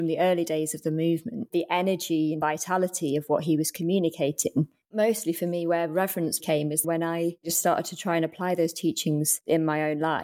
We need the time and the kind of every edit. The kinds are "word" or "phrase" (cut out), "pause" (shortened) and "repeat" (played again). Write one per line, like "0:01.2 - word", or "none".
0:06.4 - word
0:06.8 - word